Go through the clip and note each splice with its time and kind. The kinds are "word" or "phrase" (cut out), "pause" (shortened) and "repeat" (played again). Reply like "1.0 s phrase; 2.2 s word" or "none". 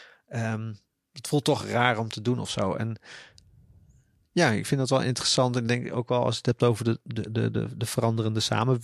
none